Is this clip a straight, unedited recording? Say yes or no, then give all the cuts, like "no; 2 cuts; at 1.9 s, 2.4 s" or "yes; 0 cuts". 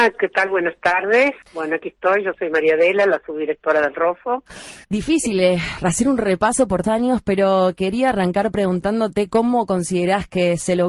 no; 3 cuts; at 1.4 s, 4.8 s, 6.8 s